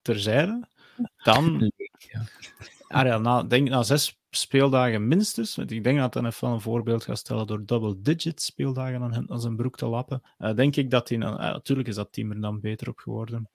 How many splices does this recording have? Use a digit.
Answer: 1